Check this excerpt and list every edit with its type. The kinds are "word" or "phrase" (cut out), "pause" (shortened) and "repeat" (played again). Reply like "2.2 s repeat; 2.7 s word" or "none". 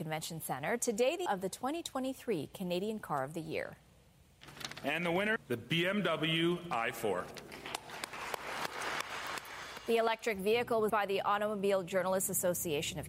1.3 s phrase; 5.4 s word; 10.9 s word